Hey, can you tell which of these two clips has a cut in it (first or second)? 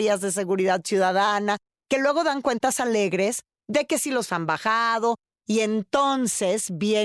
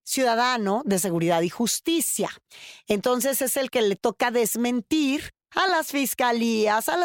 first